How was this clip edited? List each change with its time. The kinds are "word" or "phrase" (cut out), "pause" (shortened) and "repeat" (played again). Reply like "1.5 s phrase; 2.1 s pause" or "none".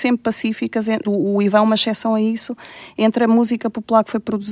1.0 s word